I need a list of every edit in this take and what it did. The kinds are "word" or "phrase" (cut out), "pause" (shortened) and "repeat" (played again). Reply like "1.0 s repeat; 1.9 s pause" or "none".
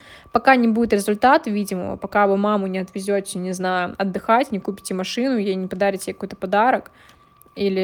none